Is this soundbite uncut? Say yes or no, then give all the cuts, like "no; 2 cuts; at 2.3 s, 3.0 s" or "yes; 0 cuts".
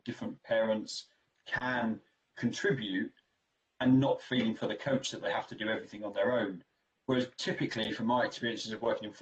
yes; 0 cuts